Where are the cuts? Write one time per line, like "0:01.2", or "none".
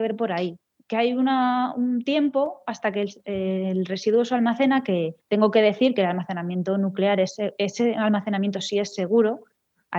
0:05.2